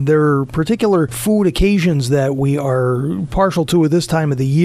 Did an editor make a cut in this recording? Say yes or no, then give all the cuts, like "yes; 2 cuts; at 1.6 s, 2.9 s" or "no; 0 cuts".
no; 0 cuts